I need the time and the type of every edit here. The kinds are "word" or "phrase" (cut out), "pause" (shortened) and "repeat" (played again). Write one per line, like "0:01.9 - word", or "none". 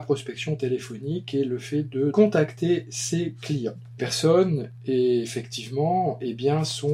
0:02.1 - word
0:04.0 - word